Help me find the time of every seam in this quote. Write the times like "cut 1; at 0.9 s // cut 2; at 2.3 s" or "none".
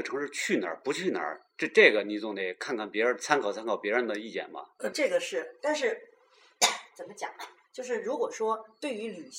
cut 1; at 4.9 s

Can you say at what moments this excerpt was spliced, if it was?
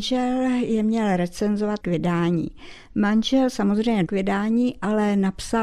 cut 1; at 1.8 s // cut 2; at 4.1 s

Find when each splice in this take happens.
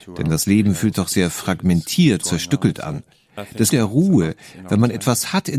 cut 1; at 0.9 s // cut 2; at 2.2 s // cut 3; at 3.7 s

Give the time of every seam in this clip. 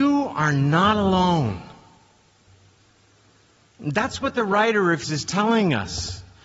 cut 1; at 5.0 s

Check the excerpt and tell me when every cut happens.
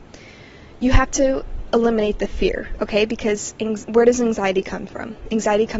none

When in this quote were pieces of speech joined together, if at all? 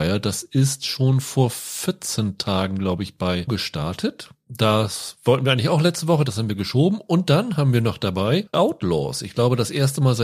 cut 1; at 3.5 s // cut 2; at 8.5 s

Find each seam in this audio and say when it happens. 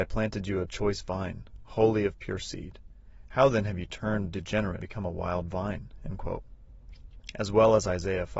cut 1; at 4.8 s

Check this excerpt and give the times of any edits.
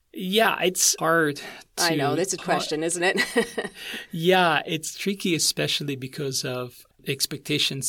cut 1; at 1.0 s // cut 2; at 2.4 s

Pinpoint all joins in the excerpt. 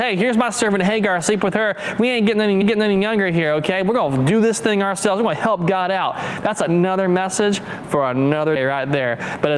cut 1; at 2.6 s // cut 2; at 8.6 s

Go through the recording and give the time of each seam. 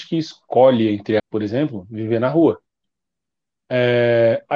cut 1; at 1.2 s

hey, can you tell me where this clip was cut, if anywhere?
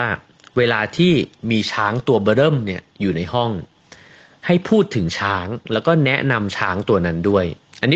none

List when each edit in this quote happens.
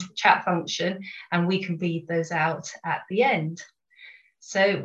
none

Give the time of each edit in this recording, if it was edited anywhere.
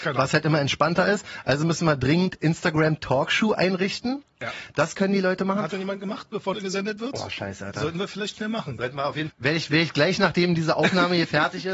cut 1; at 5.7 s // cut 2; at 6.5 s // cut 3; at 9.3 s

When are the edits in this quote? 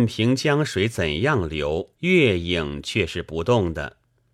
cut 1; at 1.9 s

